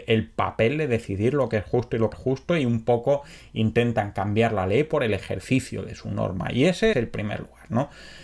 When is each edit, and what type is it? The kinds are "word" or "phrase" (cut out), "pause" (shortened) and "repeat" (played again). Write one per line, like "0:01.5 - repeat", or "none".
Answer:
0:02.1 - word
0:06.9 - word